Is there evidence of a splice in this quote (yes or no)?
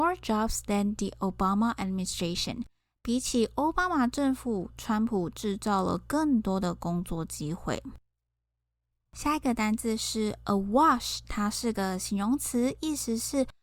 no